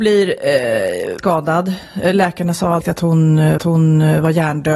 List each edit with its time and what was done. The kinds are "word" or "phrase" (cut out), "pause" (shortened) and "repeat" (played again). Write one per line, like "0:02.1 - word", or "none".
0:01.2 - word
0:02.8 - word
0:03.6 - repeat